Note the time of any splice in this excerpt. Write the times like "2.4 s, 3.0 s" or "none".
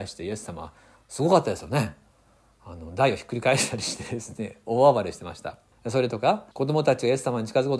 5.7 s, 6.5 s